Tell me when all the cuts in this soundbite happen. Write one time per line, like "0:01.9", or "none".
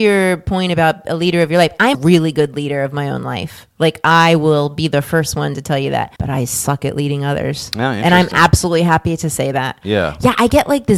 0:01.9
0:06.2